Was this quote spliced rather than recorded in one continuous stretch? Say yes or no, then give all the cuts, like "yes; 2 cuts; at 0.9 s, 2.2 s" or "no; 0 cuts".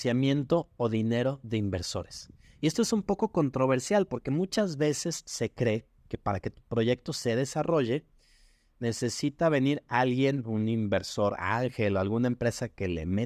no; 0 cuts